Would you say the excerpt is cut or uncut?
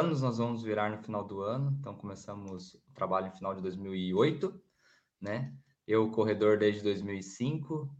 uncut